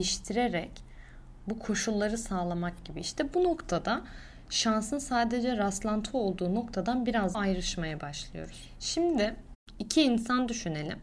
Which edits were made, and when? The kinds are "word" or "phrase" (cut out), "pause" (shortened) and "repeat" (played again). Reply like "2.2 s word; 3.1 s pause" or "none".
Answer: 7.3 s word